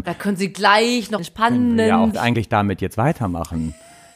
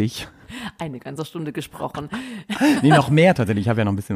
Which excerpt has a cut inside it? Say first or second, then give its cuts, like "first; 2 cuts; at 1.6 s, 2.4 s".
first; 2 cuts; at 1.2 s, 2.1 s